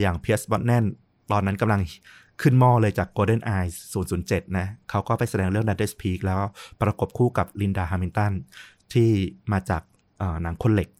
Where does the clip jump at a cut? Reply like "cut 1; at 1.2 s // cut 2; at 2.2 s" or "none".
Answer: none